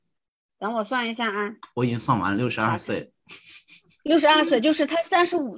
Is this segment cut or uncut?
uncut